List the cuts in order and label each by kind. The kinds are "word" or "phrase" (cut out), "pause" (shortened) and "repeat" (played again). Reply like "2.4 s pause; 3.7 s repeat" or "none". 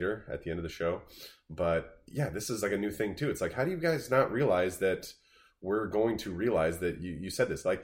none